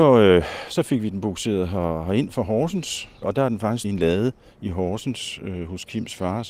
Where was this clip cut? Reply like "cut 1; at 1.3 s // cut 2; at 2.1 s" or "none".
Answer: cut 1; at 3.2 s // cut 2; at 3.8 s